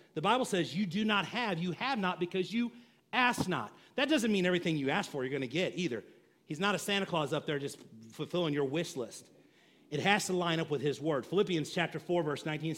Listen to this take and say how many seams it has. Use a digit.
0